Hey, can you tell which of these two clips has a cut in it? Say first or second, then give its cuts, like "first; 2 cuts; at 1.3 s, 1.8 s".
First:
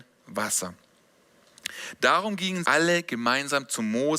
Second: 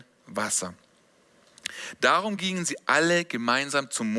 first; 1 cut; at 2.6 s